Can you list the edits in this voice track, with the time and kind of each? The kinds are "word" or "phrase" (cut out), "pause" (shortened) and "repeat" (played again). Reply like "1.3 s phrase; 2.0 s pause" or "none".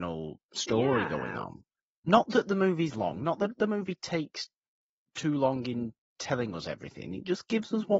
none